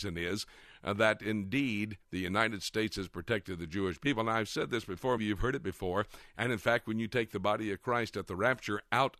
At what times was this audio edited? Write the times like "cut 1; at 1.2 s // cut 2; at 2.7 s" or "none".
cut 1; at 2.0 s // cut 2; at 5.2 s